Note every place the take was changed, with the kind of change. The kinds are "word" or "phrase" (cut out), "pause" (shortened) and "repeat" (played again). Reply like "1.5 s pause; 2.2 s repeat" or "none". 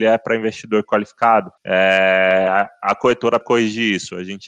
1.6 s pause; 3.4 s word